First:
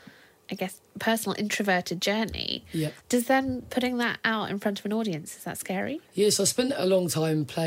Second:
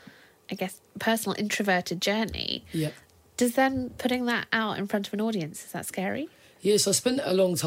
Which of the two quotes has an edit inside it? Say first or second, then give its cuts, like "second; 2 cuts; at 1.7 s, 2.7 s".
first; 2 cuts; at 3.0 s, 6.0 s